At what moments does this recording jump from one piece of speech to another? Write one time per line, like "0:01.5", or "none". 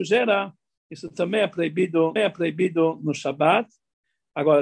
0:02.2